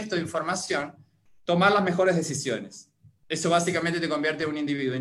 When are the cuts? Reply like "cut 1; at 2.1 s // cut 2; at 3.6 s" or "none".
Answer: none